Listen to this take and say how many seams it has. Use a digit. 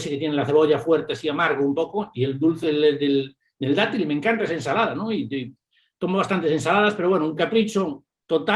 0